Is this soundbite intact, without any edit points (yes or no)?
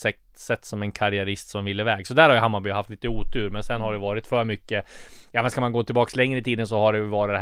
yes